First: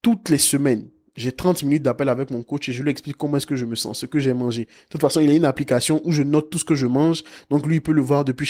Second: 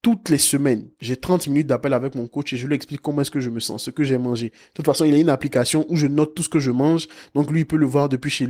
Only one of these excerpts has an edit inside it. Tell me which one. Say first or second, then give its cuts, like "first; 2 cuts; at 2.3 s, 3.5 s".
second; 1 cut; at 0.9 s